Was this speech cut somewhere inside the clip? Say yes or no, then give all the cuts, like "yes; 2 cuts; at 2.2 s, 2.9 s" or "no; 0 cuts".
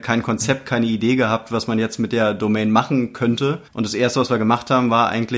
yes; 1 cut; at 3.7 s